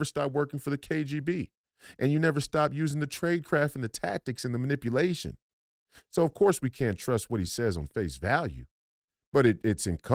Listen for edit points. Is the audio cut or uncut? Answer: uncut